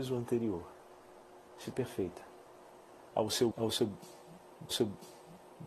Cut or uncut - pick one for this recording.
cut